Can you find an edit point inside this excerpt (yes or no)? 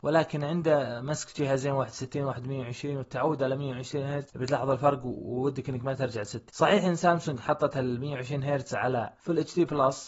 no